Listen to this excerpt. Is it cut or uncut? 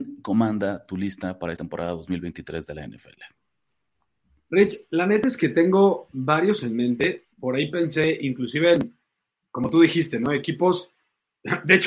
cut